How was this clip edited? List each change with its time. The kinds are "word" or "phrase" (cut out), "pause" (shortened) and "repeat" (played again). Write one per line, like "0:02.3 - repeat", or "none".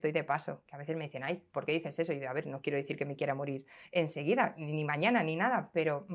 0:03.8 - pause